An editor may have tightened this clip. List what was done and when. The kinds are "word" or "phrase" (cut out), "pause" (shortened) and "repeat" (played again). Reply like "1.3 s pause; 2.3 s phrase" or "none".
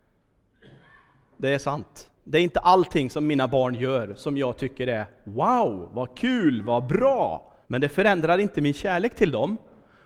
2.1 s pause; 7.6 s pause